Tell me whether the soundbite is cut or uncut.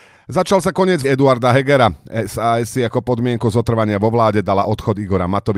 cut